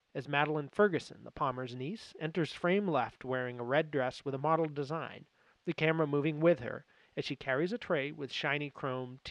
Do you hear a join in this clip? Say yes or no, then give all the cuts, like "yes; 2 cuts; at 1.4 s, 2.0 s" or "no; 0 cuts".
no; 0 cuts